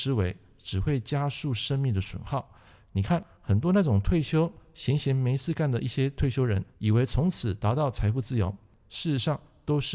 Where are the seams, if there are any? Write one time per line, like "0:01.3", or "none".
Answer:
0:06.7